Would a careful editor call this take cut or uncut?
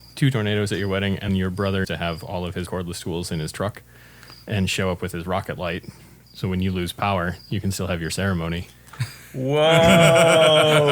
cut